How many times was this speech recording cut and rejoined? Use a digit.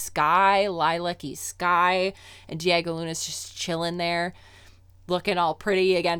0